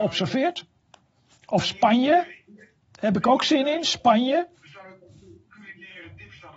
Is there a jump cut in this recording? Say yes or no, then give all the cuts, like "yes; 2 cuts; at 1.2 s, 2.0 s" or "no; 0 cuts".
no; 0 cuts